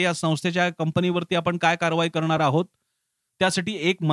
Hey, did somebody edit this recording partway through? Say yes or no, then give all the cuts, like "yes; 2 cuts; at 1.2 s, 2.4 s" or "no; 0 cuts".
no; 0 cuts